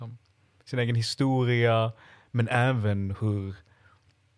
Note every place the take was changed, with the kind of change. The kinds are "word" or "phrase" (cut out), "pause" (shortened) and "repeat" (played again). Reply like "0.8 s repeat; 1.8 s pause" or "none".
none